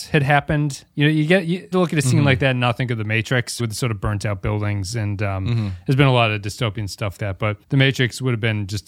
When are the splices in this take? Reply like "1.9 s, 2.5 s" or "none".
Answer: 1.7 s, 3.6 s, 7.2 s, 7.6 s